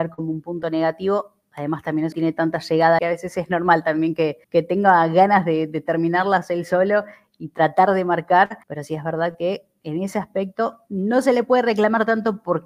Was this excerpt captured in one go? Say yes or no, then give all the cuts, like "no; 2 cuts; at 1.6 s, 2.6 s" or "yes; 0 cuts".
no; 4 cuts; at 2.1 s, 3.0 s, 4.4 s, 8.6 s